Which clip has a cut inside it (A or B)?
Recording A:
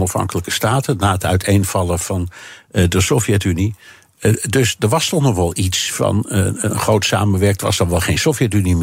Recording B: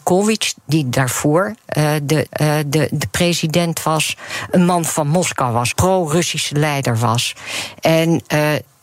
B